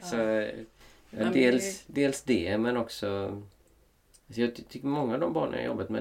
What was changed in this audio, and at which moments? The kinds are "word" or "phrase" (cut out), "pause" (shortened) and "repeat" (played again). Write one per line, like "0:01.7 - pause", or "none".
0:04.2 - pause